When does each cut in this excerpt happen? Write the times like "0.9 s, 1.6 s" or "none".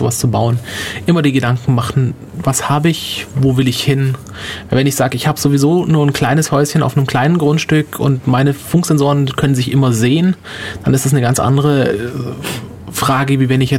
none